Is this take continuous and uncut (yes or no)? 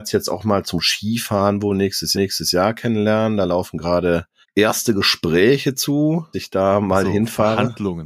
no